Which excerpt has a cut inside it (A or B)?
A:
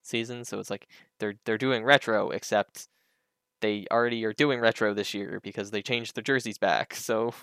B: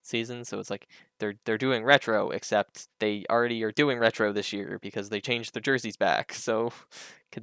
B